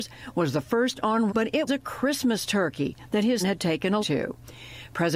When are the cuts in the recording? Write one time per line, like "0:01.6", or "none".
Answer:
0:01.3
0:01.7
0:03.4
0:04.0